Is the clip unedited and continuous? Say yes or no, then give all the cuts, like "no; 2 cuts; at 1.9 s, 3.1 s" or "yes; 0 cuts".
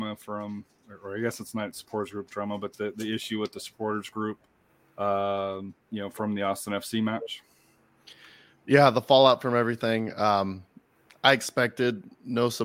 yes; 0 cuts